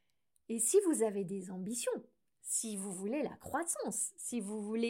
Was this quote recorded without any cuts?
yes; 0 cuts

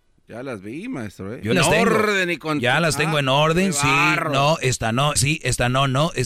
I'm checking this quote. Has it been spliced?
yes; 2 cuts; at 1.5 s, 5.2 s

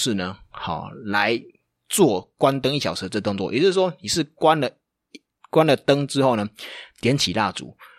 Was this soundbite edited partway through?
no; 0 cuts

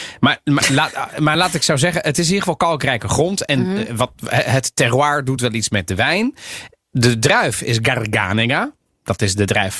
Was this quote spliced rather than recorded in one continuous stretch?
no; 0 cuts

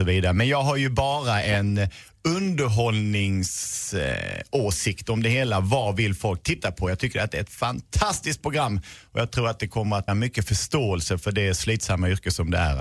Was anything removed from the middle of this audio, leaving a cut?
yes; 1 cut; at 10.1 s

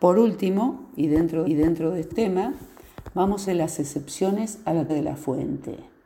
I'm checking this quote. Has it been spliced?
yes; 4 cuts; at 1.5 s, 2.1 s, 3.5 s, 4.9 s

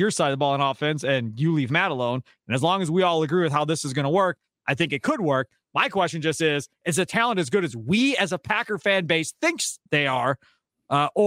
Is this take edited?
yes; 1 cut; at 9.9 s

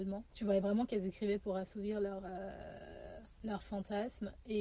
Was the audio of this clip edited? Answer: no; 0 cuts

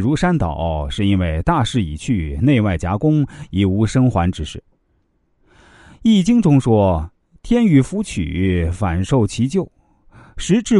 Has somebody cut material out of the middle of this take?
no; 0 cuts

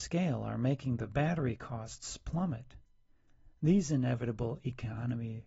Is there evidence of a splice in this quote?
no; 0 cuts

